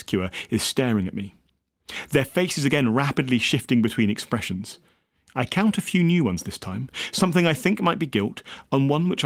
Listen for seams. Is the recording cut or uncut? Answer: uncut